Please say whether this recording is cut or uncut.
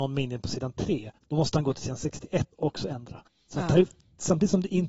cut